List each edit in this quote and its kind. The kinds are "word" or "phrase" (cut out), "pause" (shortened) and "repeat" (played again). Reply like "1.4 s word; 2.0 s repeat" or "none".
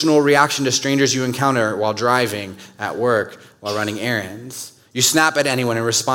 none